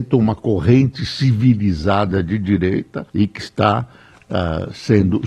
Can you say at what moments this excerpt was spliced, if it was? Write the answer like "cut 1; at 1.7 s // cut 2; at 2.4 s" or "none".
cut 1; at 3.1 s